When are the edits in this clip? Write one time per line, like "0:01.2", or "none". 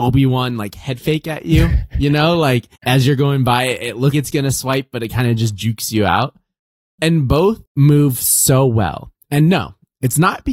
0:02.8
0:04.1
0:07.7